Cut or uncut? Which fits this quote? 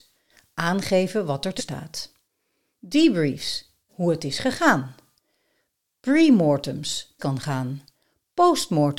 cut